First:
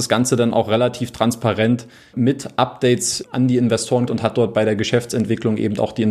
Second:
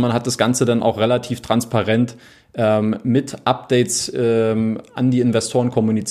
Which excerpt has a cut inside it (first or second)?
first